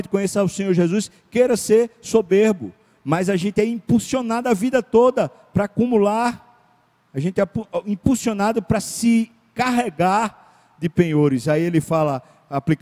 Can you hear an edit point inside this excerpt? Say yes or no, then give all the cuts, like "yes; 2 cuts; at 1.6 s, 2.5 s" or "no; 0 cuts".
no; 0 cuts